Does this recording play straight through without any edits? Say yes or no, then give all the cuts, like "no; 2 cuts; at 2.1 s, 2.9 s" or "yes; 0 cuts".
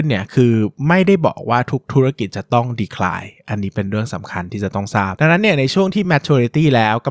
yes; 0 cuts